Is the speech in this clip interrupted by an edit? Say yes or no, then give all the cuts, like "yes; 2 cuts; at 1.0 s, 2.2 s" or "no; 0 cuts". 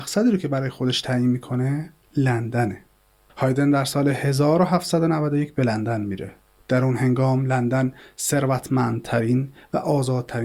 no; 0 cuts